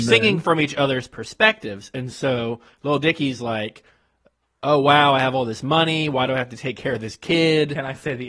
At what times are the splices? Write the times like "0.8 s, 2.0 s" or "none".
none